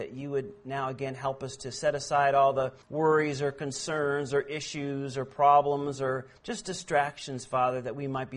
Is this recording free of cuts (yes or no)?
no